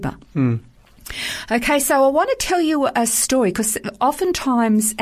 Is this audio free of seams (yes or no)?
yes